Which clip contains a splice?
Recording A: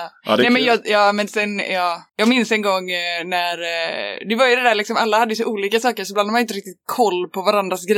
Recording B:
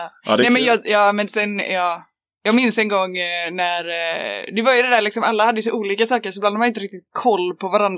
A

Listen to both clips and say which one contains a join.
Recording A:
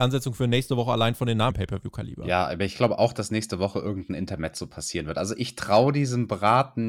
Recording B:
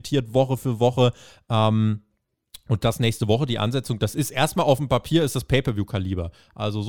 A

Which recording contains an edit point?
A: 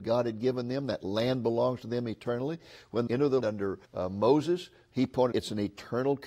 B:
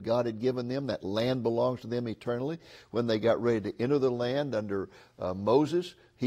A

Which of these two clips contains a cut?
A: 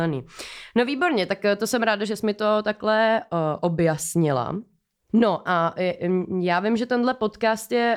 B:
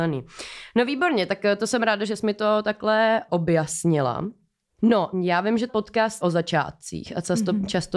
B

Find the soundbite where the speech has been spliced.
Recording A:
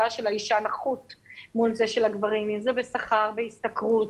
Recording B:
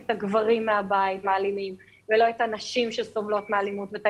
B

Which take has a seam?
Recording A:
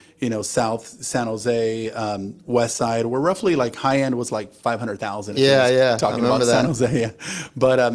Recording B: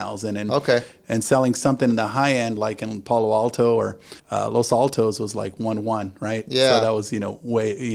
B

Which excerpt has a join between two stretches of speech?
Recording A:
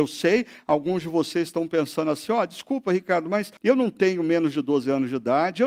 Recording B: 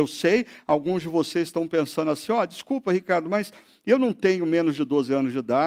A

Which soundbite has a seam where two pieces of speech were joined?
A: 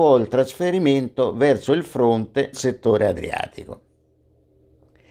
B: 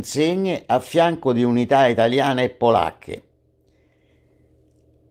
A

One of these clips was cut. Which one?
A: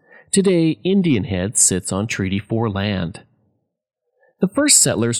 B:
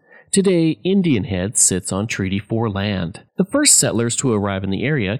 B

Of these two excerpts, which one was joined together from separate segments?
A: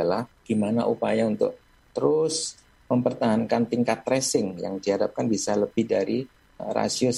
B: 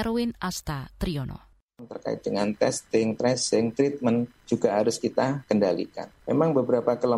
B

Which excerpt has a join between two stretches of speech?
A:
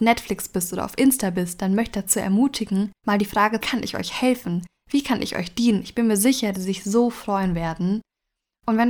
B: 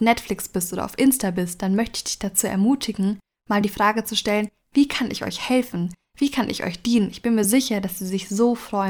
A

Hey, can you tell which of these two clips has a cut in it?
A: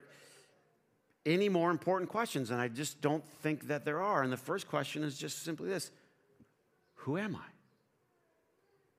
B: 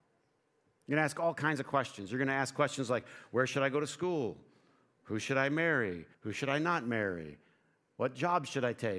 B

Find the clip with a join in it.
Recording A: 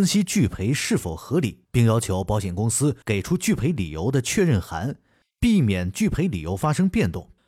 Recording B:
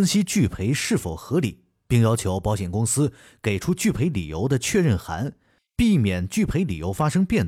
A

